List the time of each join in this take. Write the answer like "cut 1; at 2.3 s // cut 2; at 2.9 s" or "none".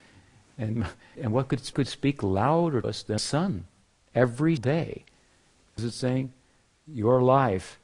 cut 1; at 1.2 s // cut 2; at 1.7 s // cut 3; at 2.8 s // cut 4; at 3.2 s // cut 5; at 4.6 s // cut 6; at 5.8 s